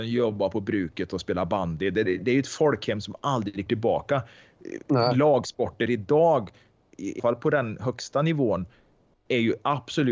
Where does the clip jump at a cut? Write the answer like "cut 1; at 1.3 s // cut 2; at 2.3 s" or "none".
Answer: cut 1; at 2.1 s // cut 2; at 3.7 s // cut 3; at 7.2 s